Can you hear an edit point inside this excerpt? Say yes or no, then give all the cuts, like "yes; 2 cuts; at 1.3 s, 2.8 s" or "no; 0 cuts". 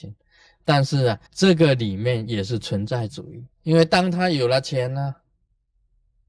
yes; 2 cuts; at 1.3 s, 3.5 s